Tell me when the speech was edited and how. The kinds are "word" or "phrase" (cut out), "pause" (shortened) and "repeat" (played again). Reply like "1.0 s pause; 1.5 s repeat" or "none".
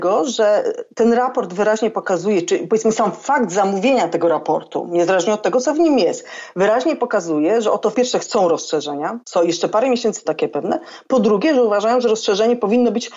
7.9 s phrase; 9.2 s pause; 10.2 s phrase